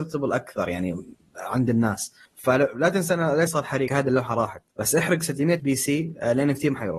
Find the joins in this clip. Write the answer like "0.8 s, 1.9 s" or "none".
3.5 s, 3.9 s, 4.7 s, 5.6 s